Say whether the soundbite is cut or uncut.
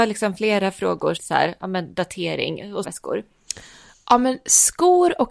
cut